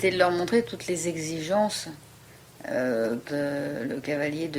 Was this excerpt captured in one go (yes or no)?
no